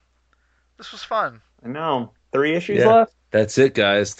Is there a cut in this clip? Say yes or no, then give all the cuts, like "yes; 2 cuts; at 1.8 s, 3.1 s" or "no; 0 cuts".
yes; 3 cuts; at 1.5 s, 2.2 s, 3.2 s